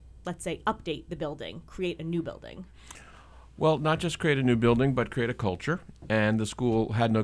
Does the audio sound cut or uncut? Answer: uncut